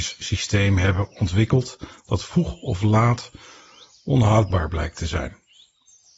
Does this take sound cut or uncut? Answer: uncut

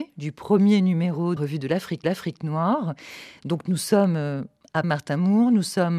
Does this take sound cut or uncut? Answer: cut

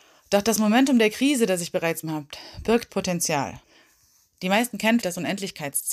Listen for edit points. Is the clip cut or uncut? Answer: cut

